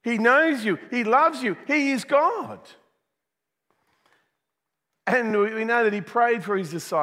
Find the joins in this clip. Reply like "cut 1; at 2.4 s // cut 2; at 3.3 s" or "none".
none